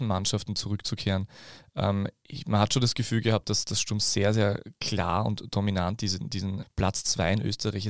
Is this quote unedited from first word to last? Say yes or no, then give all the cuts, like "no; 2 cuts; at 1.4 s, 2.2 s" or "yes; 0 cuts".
no; 1 cut; at 6.6 s